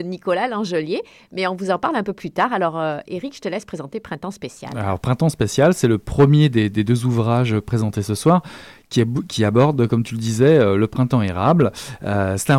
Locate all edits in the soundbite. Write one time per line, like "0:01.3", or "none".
none